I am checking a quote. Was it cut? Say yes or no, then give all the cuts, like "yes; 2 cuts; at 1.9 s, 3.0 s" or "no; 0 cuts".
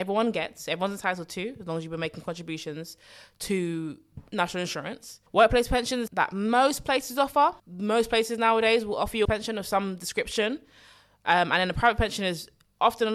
yes; 4 cuts; at 5.3 s, 6.1 s, 7.6 s, 9.2 s